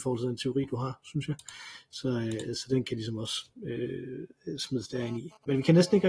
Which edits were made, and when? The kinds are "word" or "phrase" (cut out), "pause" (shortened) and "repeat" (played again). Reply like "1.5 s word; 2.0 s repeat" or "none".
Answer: none

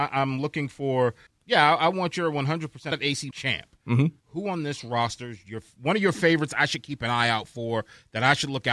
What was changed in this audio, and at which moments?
1.3 s word; 2.9 s phrase; 3.3 s phrase; 4.2 s pause

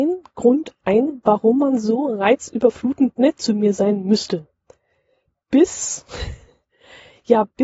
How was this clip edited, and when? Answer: none

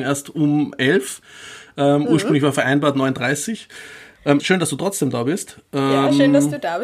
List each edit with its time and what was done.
4.4 s word

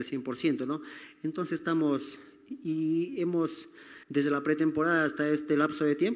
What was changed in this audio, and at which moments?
4.0 s pause

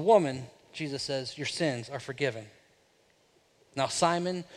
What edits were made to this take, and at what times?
none

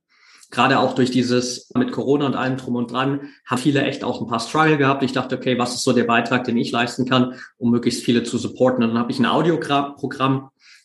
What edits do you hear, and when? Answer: 1.8 s word; 3.6 s word

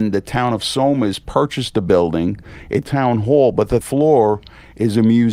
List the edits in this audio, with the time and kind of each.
2.8 s word; 3.8 s word

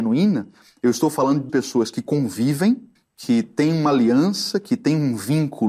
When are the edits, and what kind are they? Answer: 1.5 s word; 3.0 s pause

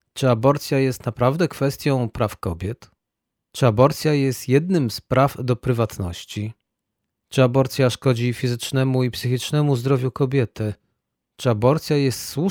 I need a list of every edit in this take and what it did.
none

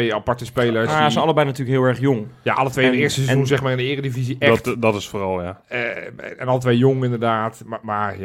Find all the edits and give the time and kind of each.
none

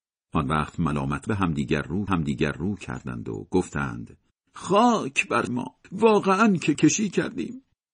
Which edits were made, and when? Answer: 1.3 s word; 2.1 s repeat; 4.3 s pause; 5.5 s word; 5.8 s pause; 6.7 s word

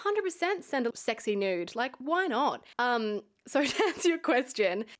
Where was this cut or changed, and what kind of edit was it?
0.9 s word; 2.7 s pause

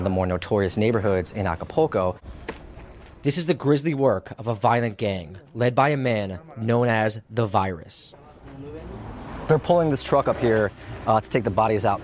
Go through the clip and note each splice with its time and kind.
none

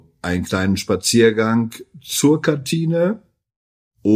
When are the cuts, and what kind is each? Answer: none

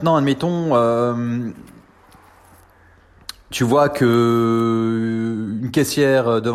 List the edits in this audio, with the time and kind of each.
none

